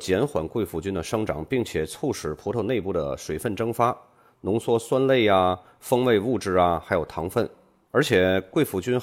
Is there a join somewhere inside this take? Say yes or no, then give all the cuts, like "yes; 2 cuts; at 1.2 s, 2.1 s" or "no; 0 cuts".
no; 0 cuts